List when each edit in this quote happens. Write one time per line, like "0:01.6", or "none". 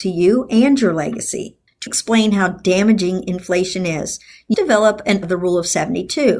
0:01.9
0:04.5
0:05.2